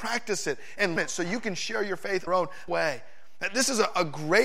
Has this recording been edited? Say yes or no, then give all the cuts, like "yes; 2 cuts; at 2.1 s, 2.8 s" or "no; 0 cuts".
yes; 3 cuts; at 1.0 s, 2.3 s, 2.7 s